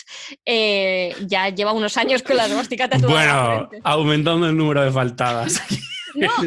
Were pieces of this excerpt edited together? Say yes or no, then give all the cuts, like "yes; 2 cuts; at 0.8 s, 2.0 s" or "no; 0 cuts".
no; 0 cuts